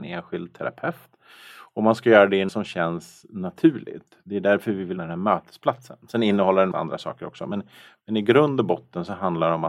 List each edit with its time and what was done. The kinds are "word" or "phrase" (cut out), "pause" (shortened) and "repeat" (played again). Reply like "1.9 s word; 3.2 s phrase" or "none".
2.5 s word; 5.0 s word; 6.7 s word